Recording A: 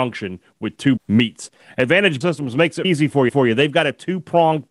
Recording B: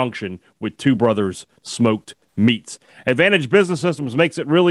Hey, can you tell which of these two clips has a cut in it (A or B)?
A